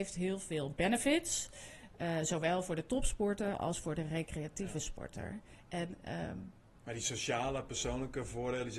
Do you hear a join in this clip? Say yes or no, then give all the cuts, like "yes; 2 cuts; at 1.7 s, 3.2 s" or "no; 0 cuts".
no; 0 cuts